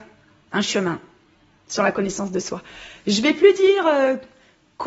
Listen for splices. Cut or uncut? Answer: uncut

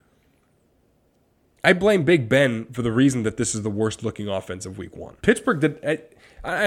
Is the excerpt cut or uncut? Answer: cut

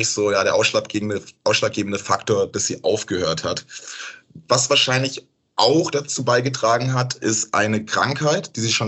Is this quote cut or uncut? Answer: uncut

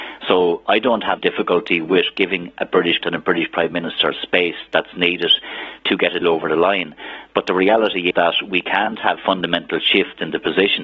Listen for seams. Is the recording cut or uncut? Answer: cut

